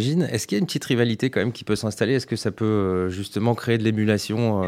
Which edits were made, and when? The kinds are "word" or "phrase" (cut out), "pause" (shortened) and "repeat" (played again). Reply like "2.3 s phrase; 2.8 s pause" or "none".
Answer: none

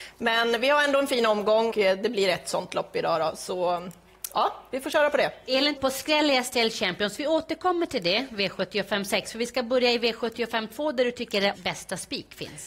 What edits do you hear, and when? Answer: 1.7 s word; 5.8 s word; 11.5 s word

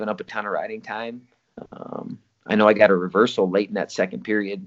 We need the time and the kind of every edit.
none

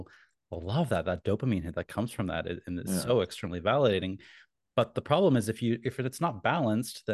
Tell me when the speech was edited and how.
none

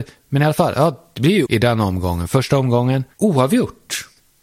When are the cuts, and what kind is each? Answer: 1.5 s word

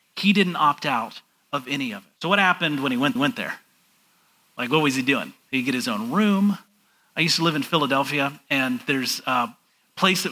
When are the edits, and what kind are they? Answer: 2.1 s pause; 3.2 s repeat; 5.4 s pause

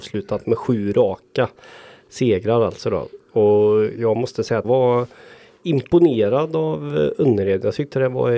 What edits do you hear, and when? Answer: 4.6 s word

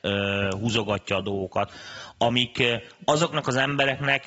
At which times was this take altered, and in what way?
none

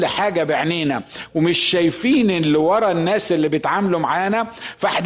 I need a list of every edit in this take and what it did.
none

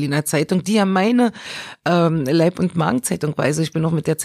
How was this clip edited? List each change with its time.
none

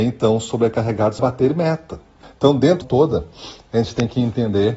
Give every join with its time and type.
1.2 s word; 2.2 s pause; 2.8 s phrase

